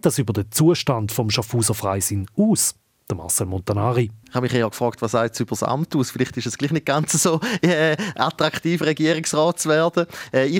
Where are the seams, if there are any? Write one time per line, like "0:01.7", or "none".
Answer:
none